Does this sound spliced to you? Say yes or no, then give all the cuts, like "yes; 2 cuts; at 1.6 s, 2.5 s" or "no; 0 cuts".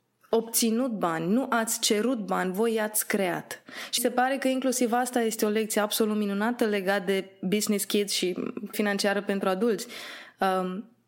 yes; 2 cuts; at 4.0 s, 8.7 s